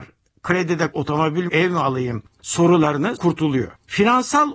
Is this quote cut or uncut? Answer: cut